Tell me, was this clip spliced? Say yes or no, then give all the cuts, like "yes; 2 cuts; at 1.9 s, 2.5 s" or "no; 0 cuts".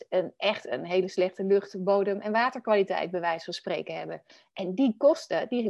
no; 0 cuts